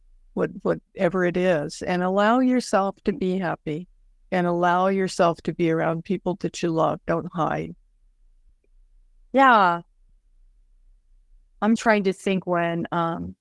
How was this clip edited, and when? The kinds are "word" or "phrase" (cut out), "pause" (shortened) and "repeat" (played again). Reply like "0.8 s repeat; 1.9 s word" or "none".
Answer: 11.8 s word